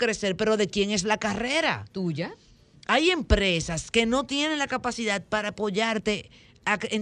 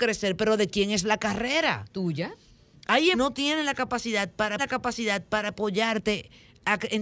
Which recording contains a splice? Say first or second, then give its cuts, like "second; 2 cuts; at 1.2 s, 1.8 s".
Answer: second; 2 cuts; at 3.1 s, 4.6 s